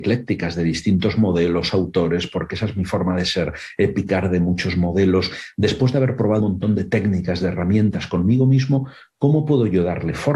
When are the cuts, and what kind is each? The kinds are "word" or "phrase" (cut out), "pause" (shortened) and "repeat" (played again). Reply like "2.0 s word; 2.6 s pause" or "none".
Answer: 6.4 s word